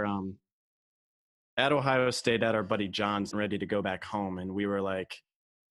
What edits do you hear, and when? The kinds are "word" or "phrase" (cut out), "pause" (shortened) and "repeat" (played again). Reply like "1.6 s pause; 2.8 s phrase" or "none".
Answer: 3.3 s phrase